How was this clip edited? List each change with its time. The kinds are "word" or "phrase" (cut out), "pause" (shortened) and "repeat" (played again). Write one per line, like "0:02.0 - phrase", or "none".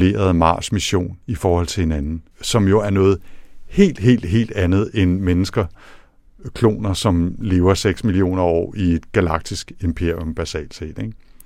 0:01.2 - pause
0:02.3 - pause